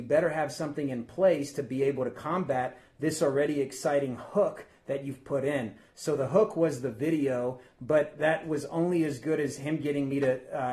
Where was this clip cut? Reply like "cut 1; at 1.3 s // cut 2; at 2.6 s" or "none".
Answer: none